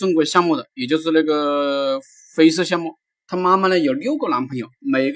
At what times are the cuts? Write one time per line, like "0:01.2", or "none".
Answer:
0:03.1